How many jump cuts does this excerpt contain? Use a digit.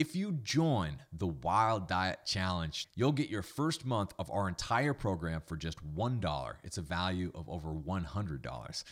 1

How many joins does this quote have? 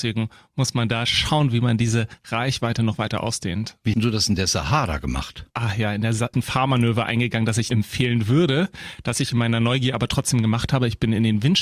4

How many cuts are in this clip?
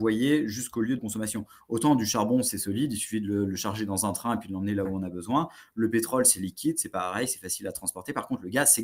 1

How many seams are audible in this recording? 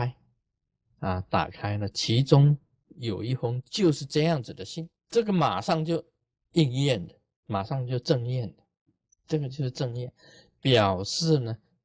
1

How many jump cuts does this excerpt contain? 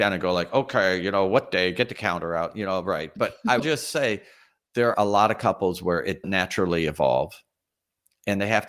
3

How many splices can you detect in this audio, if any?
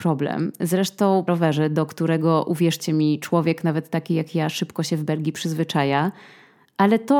1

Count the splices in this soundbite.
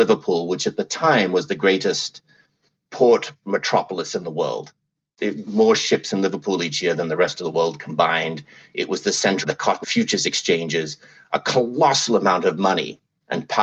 3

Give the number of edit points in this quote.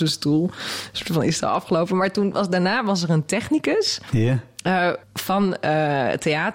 1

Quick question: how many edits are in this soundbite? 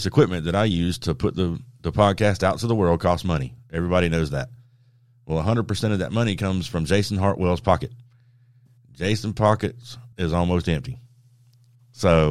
1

